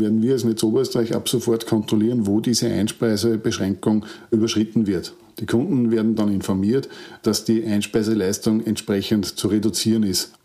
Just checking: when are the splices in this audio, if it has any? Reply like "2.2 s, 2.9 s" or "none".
none